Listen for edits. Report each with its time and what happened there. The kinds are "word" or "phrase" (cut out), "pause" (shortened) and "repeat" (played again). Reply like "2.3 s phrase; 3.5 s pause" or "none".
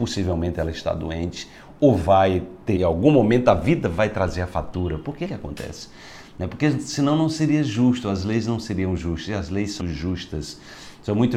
2.8 s phrase; 5.2 s word; 9.8 s word